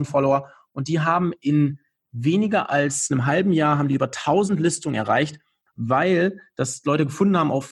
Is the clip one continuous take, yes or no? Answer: yes